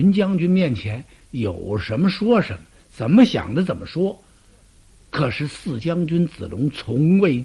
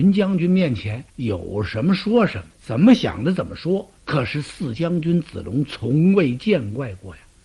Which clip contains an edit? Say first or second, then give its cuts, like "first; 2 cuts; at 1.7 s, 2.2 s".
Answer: second; 3 cuts; at 1.1 s, 2.5 s, 4.0 s